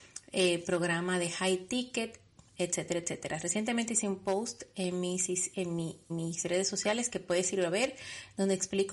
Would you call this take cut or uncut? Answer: cut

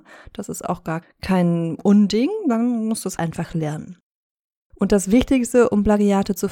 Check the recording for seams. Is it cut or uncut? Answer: cut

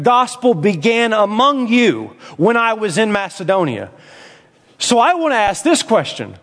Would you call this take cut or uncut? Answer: uncut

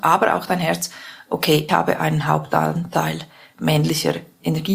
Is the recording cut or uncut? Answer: cut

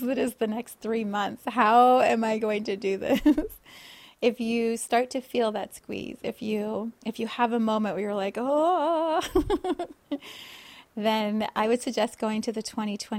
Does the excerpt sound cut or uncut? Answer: cut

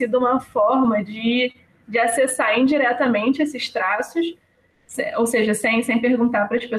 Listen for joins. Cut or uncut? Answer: uncut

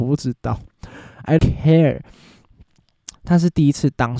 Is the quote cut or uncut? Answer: cut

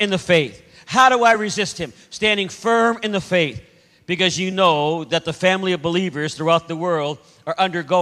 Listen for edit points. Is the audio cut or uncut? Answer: uncut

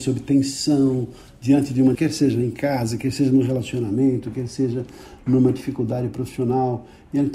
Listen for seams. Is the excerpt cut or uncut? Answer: cut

